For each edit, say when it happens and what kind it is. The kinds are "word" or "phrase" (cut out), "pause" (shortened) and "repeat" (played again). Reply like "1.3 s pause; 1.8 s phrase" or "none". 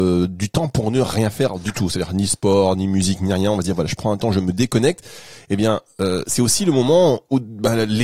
none